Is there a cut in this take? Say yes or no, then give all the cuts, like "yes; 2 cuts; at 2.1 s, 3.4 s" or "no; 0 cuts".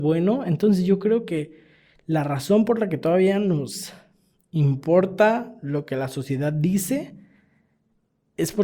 no; 0 cuts